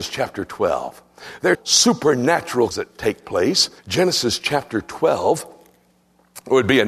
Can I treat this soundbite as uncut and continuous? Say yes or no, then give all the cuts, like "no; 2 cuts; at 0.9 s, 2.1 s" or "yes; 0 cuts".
no; 3 cuts; at 1.5 s, 2.7 s, 3.8 s